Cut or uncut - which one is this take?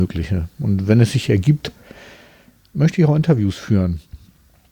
uncut